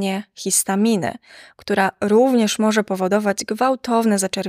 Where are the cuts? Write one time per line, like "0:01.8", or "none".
none